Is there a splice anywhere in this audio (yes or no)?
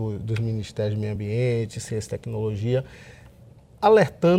no